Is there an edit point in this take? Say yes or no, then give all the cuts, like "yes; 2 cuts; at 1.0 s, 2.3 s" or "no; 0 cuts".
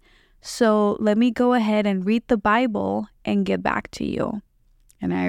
no; 0 cuts